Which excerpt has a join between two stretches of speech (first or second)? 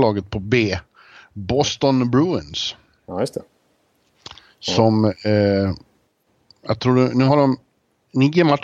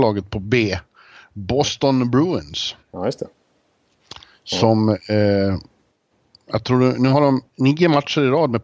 second